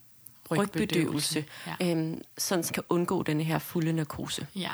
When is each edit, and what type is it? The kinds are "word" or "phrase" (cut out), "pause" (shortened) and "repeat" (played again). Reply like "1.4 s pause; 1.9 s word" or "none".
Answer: 2.7 s word